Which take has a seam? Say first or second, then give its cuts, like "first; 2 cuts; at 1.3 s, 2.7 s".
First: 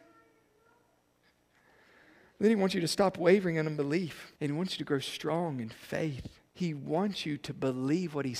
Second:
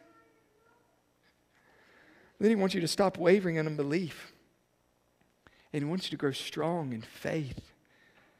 first; 2 cuts; at 4.4 s, 6.5 s